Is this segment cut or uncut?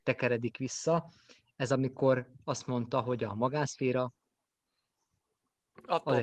uncut